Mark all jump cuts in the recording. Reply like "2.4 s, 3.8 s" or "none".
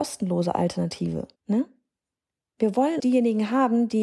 1.4 s, 3.0 s